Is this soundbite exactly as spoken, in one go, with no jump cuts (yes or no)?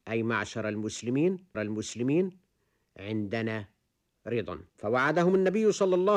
no